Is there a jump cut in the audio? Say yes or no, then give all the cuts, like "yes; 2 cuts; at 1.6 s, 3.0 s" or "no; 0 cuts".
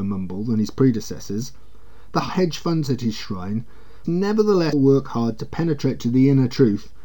yes; 4 cuts; at 2.3 s, 2.9 s, 4.0 s, 4.7 s